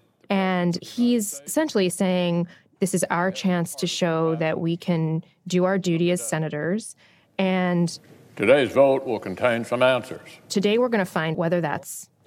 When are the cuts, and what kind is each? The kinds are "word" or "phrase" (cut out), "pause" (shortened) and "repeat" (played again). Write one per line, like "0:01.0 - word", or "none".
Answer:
0:11.3 - word